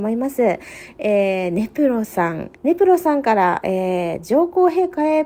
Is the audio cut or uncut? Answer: cut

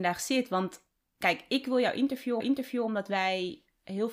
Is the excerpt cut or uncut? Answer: cut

